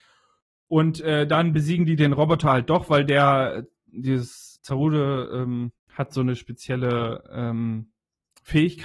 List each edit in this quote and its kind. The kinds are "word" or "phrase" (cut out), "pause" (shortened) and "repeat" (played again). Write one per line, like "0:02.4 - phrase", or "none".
0:04.6 - pause
0:05.8 - pause